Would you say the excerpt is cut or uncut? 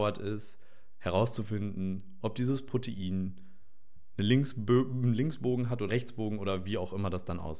cut